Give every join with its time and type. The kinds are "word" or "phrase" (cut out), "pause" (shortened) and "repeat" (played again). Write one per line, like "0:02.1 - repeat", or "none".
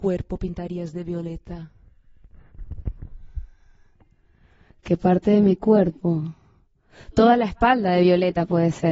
none